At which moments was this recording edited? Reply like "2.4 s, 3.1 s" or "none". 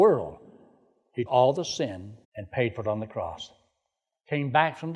1.3 s, 2.2 s